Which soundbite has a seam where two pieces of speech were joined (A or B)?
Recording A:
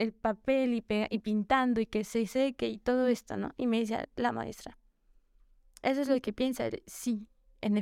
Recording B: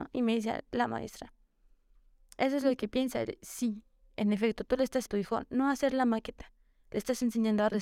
B